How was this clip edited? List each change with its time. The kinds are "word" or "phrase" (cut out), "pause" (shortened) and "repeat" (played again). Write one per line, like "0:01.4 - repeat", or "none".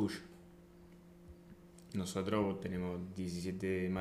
none